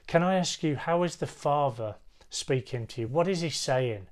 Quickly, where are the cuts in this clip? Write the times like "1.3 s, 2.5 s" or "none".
none